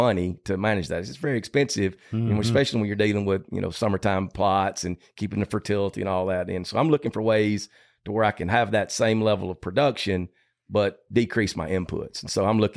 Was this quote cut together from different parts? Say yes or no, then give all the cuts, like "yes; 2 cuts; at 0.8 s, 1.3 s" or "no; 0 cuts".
no; 0 cuts